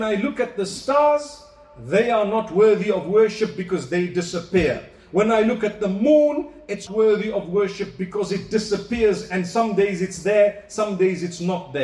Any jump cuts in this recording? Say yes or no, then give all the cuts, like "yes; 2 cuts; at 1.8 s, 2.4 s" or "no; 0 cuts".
yes; 1 cut; at 6.9 s